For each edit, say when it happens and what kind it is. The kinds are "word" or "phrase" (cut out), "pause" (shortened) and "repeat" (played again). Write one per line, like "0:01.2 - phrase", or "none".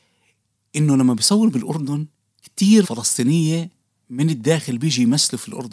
0:02.8 - word